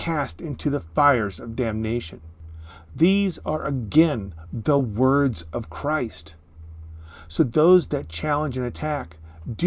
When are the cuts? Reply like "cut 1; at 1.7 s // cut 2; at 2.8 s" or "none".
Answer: none